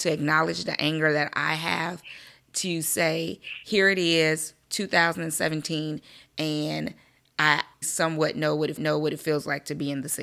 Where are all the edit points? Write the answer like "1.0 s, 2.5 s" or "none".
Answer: 7.8 s, 8.8 s